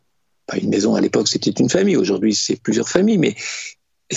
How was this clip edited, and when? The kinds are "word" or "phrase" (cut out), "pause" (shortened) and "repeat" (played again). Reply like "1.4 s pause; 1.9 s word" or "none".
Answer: none